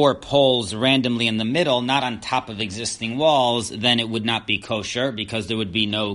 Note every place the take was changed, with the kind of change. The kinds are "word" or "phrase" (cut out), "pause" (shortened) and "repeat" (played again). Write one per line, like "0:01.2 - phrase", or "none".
none